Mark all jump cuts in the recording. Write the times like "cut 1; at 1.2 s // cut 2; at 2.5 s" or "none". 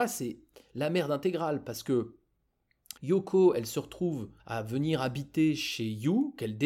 cut 1; at 3.0 s // cut 2; at 4.4 s